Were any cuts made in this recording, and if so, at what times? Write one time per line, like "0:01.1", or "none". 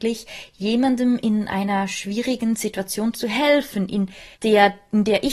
0:04.3